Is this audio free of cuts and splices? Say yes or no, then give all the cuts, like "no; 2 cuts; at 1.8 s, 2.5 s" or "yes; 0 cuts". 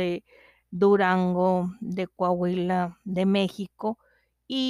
yes; 0 cuts